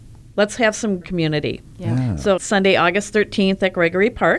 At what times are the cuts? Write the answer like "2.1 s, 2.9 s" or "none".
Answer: 1.0 s, 2.4 s